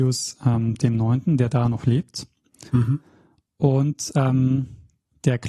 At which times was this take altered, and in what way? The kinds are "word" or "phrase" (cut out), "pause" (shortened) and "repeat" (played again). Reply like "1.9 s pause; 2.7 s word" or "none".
2.7 s pause